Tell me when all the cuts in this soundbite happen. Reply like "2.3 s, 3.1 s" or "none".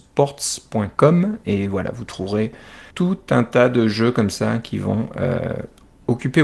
2.9 s